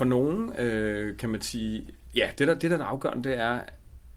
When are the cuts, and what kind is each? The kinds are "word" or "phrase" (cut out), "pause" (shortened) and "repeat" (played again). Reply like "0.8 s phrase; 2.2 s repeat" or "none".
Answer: none

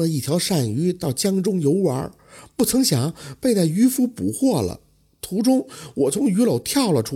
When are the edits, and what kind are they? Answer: none

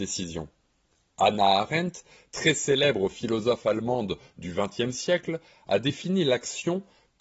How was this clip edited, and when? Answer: none

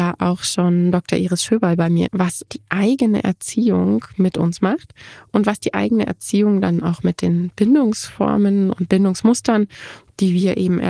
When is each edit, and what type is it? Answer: 2.1 s phrase; 2.5 s word

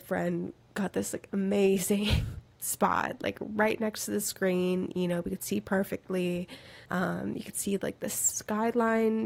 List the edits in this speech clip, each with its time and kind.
6.9 s pause

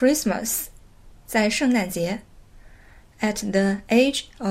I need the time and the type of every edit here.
none

